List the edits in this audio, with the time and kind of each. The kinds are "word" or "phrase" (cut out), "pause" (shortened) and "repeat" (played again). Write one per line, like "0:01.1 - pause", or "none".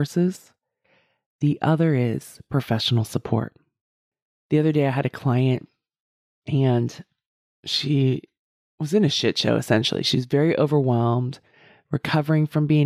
none